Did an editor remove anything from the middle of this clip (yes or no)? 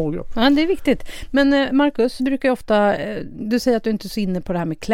yes